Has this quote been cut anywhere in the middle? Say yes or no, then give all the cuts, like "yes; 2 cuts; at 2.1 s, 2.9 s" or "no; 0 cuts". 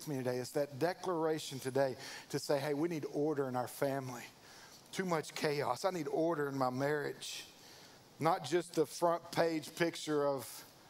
yes; 1 cut; at 8.0 s